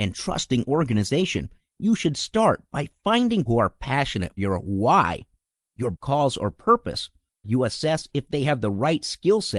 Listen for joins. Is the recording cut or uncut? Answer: cut